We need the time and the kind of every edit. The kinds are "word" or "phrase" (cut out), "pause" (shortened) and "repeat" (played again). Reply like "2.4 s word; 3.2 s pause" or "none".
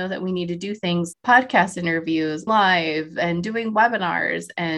1.1 s word; 2.5 s word